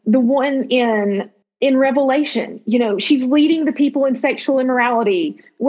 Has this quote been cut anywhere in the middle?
yes; 1 cut; at 1.4 s

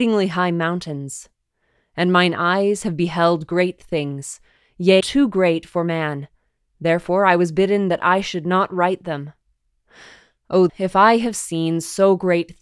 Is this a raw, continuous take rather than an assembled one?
no; 2 cuts; at 5.0 s, 10.7 s

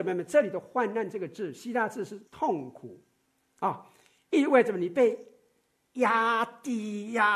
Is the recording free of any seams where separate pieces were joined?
no; 1 cut; at 2.3 s

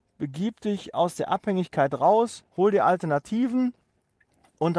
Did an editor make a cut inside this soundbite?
yes; 1 cut; at 2.5 s

